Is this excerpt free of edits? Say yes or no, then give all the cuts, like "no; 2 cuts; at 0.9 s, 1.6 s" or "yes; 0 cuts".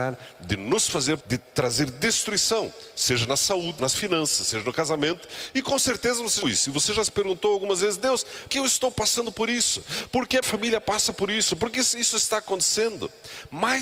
no; 5 cuts; at 1.2 s, 3.8 s, 6.4 s, 8.5 s, 10.4 s